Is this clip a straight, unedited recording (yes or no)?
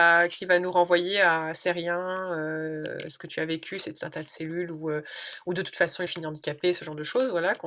no